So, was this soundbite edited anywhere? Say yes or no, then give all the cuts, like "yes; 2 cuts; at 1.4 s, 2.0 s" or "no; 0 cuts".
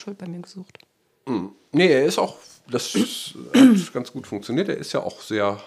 yes; 1 cut; at 2.6 s